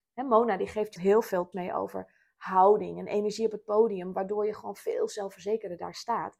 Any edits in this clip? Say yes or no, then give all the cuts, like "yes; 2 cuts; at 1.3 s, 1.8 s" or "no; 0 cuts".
yes; 2 cuts; at 1.0 s, 1.5 s